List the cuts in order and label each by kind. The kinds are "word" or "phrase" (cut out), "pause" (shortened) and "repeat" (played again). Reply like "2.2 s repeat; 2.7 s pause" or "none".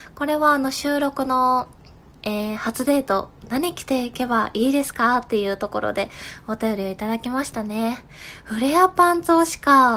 none